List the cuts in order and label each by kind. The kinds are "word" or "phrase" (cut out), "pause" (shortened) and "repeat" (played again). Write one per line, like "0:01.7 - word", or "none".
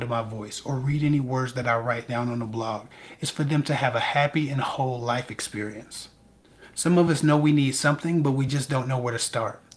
none